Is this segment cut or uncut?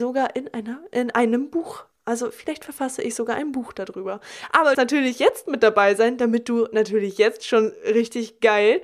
cut